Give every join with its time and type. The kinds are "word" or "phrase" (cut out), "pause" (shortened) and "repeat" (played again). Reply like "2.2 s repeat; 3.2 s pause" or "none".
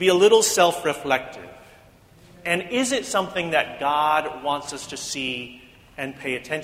none